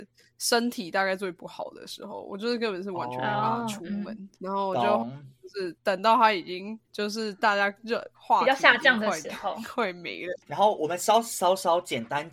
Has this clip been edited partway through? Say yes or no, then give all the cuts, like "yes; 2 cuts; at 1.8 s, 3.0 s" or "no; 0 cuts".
yes; 3 cuts; at 4.3 s, 6.8 s, 8.1 s